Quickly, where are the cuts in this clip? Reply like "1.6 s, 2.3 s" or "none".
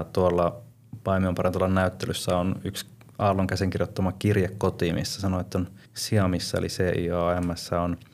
5.9 s